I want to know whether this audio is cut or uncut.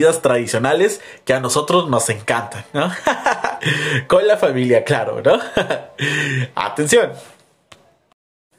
uncut